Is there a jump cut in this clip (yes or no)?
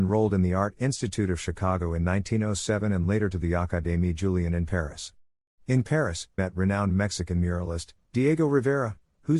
yes